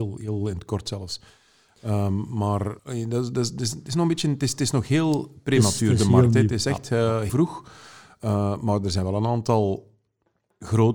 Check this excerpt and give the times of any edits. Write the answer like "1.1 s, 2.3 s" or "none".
2.8 s, 7.3 s